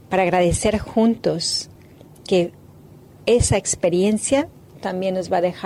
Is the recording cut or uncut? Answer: uncut